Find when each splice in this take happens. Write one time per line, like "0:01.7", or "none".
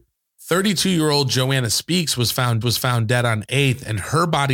0:02.6
0:03.4